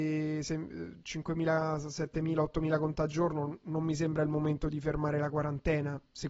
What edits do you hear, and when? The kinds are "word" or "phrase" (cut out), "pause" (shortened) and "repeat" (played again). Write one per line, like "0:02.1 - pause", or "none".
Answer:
0:03.1 - word